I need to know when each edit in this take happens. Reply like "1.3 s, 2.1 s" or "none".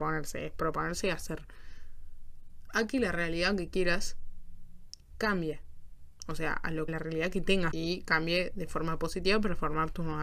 6.9 s, 7.7 s